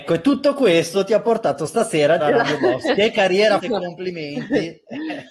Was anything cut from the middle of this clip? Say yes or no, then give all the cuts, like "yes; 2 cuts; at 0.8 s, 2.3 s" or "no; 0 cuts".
yes; 2 cuts; at 2.2 s, 3.6 s